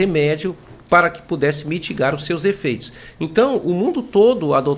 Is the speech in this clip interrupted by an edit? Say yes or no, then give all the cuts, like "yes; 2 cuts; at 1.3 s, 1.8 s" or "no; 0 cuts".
no; 0 cuts